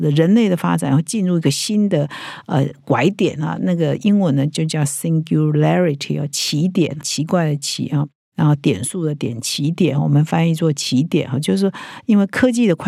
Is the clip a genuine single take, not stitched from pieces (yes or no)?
no